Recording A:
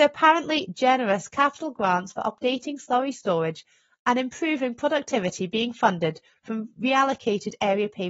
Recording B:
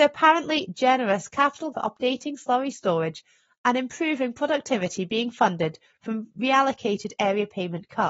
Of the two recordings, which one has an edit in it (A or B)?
B